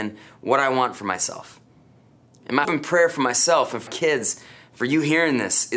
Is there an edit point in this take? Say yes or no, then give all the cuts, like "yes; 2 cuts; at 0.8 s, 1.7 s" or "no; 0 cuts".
yes; 2 cuts; at 2.6 s, 3.9 s